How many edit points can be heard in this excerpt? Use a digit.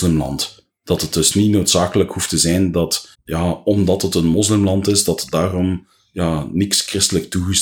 1